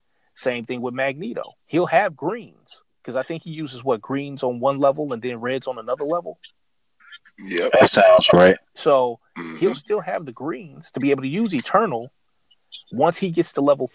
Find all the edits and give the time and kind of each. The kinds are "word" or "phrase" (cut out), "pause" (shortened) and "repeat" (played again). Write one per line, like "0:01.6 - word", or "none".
0:01.6 - pause